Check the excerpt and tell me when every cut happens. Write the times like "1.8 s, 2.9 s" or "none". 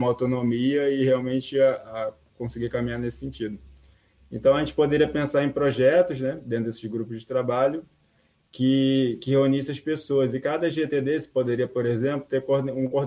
none